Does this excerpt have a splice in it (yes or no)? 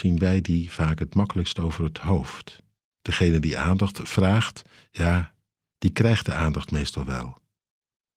no